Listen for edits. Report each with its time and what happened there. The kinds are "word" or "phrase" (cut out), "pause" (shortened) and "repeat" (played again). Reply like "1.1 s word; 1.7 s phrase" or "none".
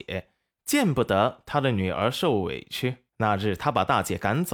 3.1 s pause